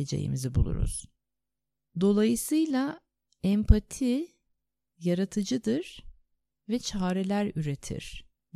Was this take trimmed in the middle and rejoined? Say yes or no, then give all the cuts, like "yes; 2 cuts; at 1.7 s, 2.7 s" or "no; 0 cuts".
no; 0 cuts